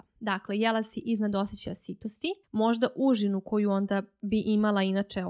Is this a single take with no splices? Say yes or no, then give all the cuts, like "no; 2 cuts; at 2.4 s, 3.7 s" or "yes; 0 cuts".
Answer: no; 1 cut; at 2.4 s